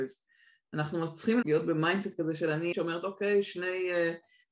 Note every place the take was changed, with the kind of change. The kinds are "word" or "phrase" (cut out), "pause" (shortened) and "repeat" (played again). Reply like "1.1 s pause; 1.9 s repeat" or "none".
1.4 s word; 2.7 s word